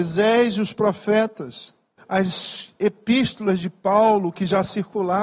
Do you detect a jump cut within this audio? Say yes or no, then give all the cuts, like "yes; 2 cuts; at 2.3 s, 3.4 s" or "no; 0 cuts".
yes; 1 cut; at 2.0 s